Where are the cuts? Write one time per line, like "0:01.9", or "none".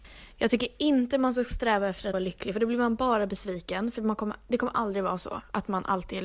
0:02.1